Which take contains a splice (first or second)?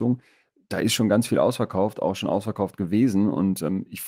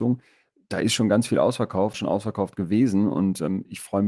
second